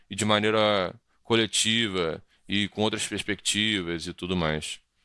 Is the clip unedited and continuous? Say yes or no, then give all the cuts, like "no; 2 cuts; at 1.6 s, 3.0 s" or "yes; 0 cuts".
yes; 0 cuts